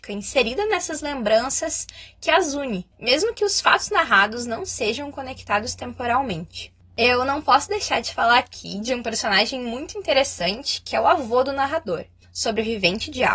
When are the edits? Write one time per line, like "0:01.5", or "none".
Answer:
0:02.9